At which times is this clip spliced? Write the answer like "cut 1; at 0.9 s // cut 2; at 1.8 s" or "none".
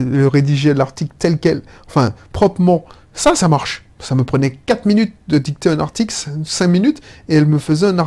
none